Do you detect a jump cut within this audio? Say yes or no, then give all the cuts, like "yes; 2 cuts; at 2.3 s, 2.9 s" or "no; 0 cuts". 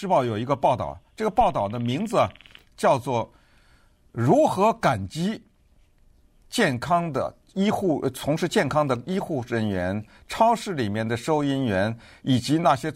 no; 0 cuts